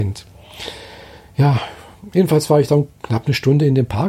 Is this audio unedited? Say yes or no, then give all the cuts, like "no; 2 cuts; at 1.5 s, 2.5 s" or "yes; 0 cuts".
yes; 0 cuts